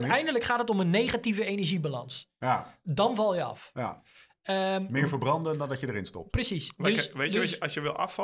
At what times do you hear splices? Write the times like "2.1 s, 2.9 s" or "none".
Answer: none